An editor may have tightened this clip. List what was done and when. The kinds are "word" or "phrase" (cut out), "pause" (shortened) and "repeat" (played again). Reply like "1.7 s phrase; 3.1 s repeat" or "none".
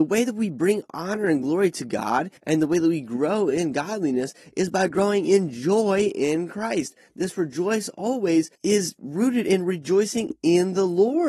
2.4 s pause; 8.6 s pause